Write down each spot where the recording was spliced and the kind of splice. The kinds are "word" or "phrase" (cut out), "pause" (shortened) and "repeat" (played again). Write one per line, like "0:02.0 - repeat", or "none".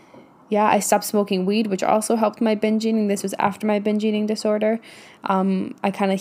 none